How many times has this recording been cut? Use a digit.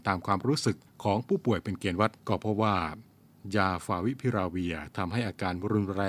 1